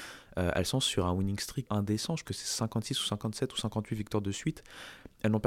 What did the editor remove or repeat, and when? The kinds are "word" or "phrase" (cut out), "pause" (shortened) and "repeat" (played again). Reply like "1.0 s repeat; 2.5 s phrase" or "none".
1.7 s word; 2.3 s word